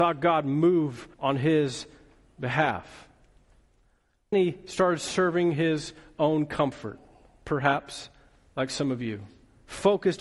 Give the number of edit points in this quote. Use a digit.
2